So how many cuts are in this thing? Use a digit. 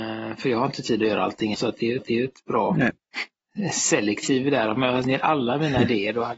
3